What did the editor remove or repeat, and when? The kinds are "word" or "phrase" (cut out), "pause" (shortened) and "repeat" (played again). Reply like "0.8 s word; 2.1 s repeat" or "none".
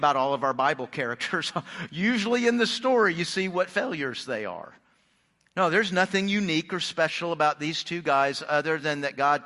none